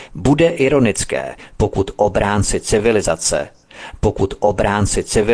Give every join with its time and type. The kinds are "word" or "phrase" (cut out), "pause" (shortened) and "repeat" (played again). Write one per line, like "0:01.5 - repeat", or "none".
0:04.0 - repeat